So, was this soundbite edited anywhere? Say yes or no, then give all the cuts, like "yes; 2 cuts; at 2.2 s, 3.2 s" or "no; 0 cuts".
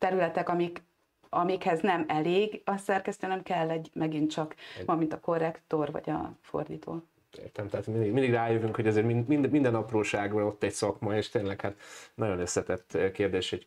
yes; 1 cut; at 4.9 s